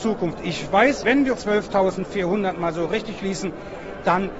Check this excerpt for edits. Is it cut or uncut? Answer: cut